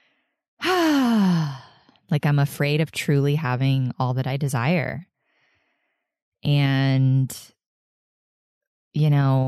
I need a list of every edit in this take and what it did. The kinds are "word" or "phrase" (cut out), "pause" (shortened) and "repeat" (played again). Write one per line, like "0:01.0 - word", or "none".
none